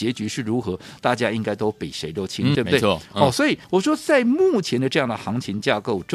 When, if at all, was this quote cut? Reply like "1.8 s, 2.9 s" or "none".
2.5 s, 3.6 s